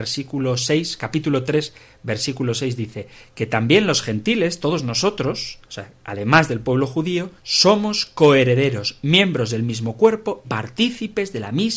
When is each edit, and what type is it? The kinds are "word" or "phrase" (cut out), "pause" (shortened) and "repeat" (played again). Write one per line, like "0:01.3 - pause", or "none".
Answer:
0:05.6 - pause
0:07.4 - pause
0:10.4 - word